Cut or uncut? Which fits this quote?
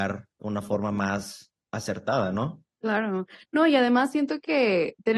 uncut